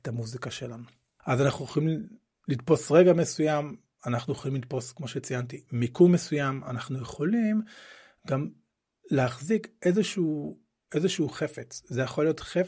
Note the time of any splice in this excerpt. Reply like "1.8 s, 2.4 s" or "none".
none

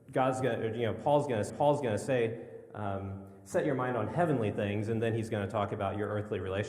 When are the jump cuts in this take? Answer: 1.5 s

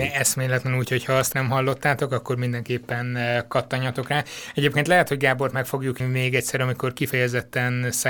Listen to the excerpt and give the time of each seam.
1.3 s, 6.0 s

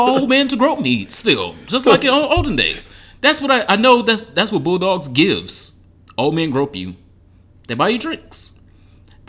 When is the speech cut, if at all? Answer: none

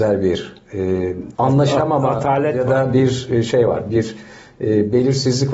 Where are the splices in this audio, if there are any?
1.3 s

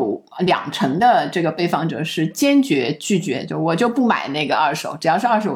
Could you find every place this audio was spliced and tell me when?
none

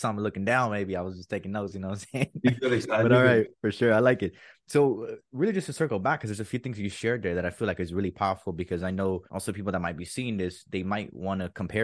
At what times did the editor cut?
9.3 s

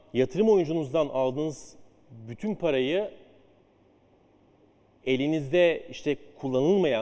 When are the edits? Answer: none

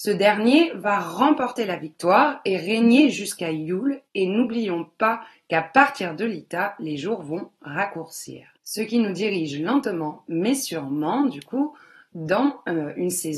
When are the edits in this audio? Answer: 4.1 s, 8.5 s

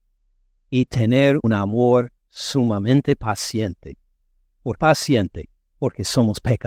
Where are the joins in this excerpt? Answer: 1.4 s, 4.8 s

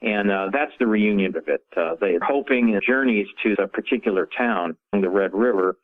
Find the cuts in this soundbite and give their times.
1.3 s, 2.2 s, 2.8 s, 3.6 s, 4.9 s

